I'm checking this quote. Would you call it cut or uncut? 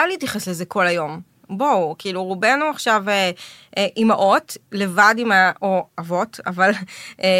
uncut